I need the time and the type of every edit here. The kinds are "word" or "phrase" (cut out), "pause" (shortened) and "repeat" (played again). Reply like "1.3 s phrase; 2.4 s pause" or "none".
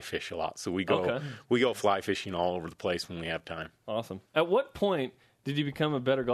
none